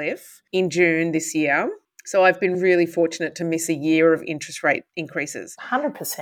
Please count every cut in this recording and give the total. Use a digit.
2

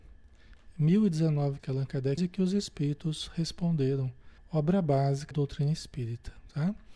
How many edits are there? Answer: 4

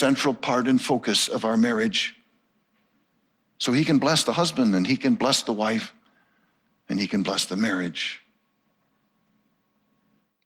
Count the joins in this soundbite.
0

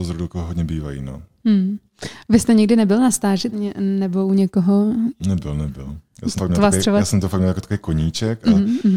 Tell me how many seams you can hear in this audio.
2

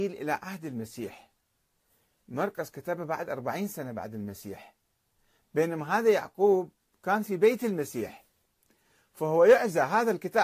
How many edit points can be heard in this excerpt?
0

